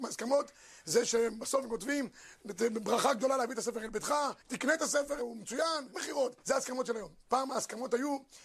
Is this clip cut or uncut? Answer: cut